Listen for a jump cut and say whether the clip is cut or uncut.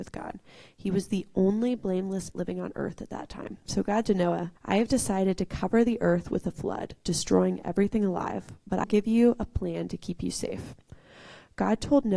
cut